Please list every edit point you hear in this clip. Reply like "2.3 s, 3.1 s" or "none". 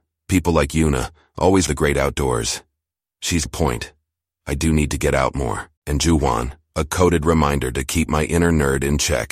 1.7 s, 3.5 s, 5.8 s